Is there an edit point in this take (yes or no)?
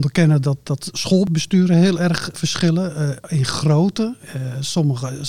no